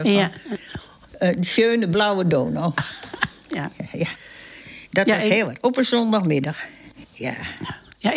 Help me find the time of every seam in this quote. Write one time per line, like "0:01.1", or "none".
0:04.9